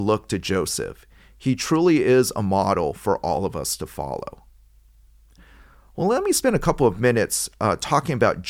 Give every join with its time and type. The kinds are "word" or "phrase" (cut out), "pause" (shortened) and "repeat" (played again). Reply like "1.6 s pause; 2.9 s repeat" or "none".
none

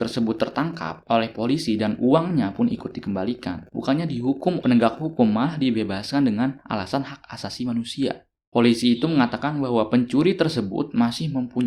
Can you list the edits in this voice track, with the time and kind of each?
3.7 s pause; 4.6 s word

